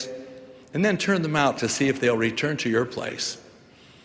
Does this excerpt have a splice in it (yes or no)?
no